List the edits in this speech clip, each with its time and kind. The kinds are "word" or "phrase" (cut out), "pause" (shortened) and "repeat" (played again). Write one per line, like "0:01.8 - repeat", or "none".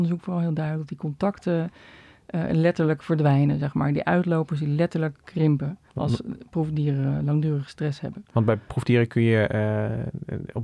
0:05.9 - pause